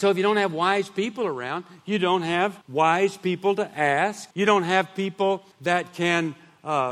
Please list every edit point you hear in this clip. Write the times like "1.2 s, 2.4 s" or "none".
2.6 s, 4.3 s, 5.5 s

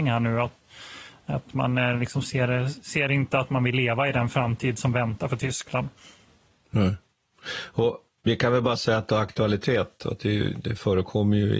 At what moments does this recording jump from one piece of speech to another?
none

